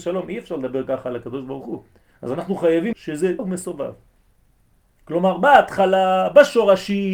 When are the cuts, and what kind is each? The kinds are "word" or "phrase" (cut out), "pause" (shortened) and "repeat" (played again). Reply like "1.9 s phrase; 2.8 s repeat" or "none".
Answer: 2.0 s pause; 2.9 s word; 3.4 s word

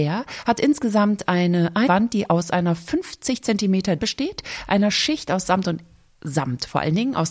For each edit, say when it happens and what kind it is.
1.9 s phrase; 4.0 s phrase

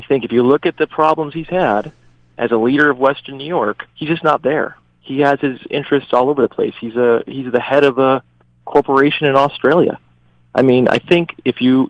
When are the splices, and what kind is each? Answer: 3.9 s pause

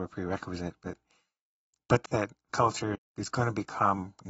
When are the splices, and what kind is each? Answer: 2.1 s word; 2.5 s word; 2.9 s word

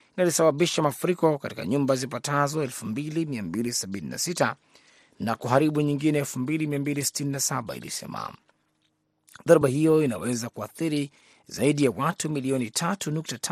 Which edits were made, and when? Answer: none

